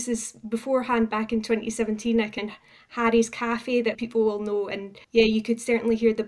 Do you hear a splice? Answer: yes; 3 cuts; at 2.4 s, 3.9 s, 5.0 s

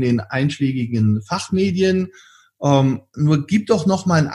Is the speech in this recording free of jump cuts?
yes; 0 cuts

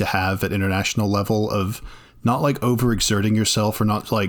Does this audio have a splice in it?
no; 0 cuts

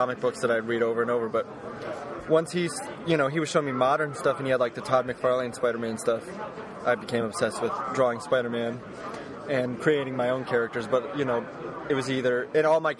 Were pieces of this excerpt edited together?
no; 0 cuts

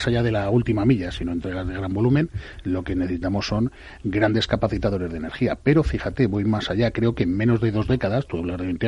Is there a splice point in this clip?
no; 0 cuts

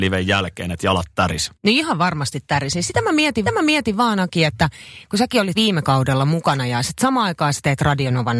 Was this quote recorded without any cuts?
no; 3 cuts; at 1.5 s, 3.4 s, 5.5 s

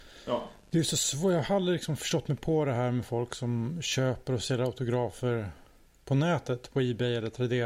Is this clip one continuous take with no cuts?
yes; 0 cuts

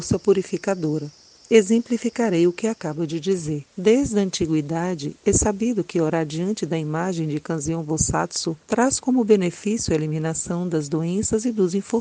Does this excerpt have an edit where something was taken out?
yes; 3 cuts; at 1.4 s, 3.7 s, 8.6 s

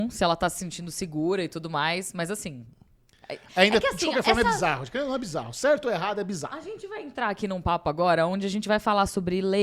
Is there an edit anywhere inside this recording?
no; 0 cuts

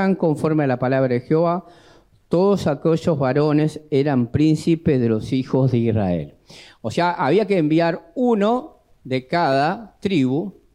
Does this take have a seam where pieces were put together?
no; 0 cuts

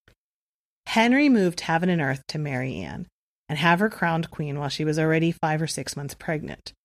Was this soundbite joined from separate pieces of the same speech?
no; 0 cuts

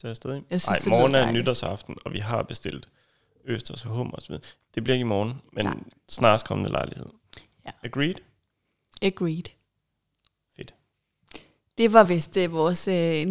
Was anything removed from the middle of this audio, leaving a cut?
no; 0 cuts

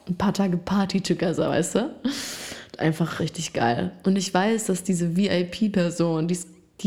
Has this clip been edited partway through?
yes; 1 cut; at 3.2 s

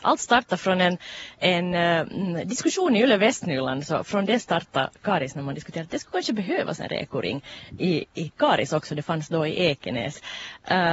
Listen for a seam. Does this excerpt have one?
no; 0 cuts

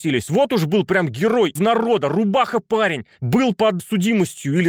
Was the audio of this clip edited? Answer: yes; 3 cuts; at 1.6 s, 3.2 s, 3.8 s

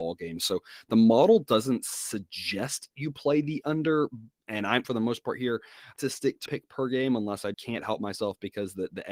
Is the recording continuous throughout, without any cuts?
no; 4 cuts; at 4.8 s, 6.0 s, 6.5 s, 7.5 s

